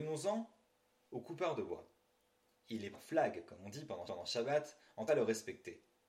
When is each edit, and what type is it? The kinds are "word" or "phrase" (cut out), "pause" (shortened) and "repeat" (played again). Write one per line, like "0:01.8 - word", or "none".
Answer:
0:02.9 - word
0:04.1 - repeat
0:05.1 - phrase